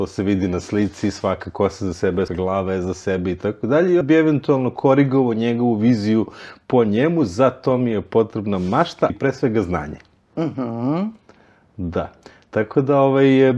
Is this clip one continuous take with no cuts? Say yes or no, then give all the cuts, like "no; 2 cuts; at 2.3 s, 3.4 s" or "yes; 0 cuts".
no; 3 cuts; at 2.3 s, 4.0 s, 9.1 s